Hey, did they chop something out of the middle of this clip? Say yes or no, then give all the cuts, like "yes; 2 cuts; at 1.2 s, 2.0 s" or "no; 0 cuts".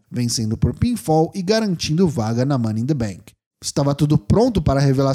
no; 0 cuts